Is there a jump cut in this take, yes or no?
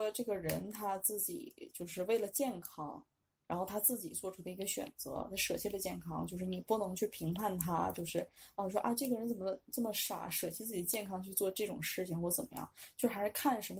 no